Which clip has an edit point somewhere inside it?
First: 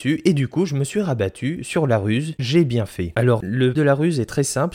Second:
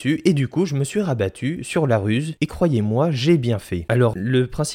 first; 2 cuts; at 2.4 s, 3.7 s

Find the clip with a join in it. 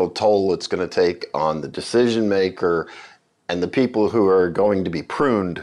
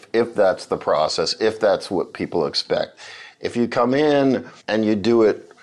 second; 1 cut; at 4.6 s

